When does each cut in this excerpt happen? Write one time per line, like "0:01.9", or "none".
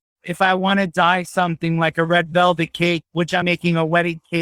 0:03.1
0:03.4